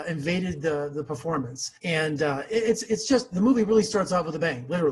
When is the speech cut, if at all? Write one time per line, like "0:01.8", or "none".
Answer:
0:01.8